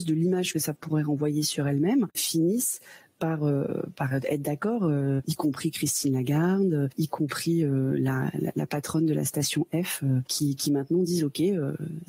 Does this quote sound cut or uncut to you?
uncut